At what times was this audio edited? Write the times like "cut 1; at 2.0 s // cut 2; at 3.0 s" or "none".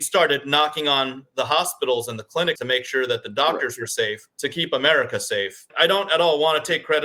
cut 1; at 2.6 s // cut 2; at 4.3 s // cut 3; at 5.7 s